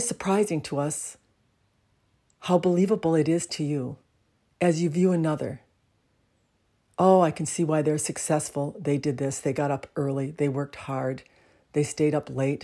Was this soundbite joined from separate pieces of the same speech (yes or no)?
no